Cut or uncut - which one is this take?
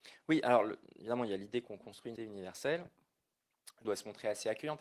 cut